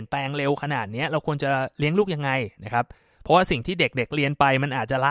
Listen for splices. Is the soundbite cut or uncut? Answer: uncut